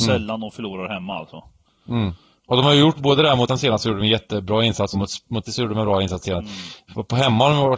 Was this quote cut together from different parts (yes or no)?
yes